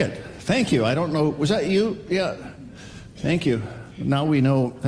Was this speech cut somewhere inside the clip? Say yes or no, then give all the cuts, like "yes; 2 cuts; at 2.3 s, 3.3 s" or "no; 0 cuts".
no; 0 cuts